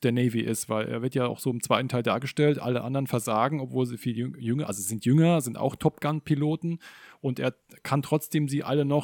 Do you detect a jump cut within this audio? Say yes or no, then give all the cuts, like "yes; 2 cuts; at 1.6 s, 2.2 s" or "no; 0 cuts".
no; 0 cuts